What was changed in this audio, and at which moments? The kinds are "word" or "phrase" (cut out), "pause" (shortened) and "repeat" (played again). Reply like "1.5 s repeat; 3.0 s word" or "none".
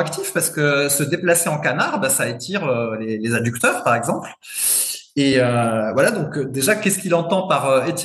none